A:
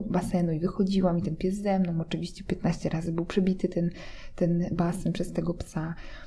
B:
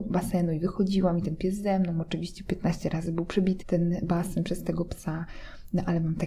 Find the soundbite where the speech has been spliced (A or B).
B